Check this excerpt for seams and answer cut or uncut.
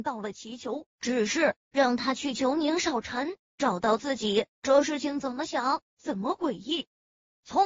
cut